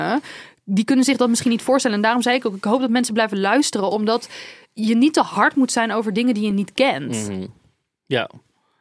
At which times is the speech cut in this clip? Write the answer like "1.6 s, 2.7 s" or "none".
none